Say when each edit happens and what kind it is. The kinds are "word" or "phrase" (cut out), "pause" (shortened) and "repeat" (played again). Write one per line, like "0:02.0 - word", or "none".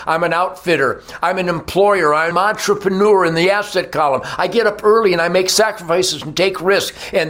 0:02.3 - word